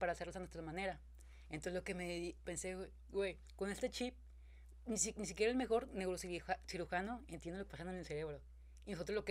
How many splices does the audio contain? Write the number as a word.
one